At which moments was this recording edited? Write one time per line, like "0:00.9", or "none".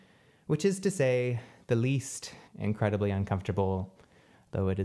0:02.5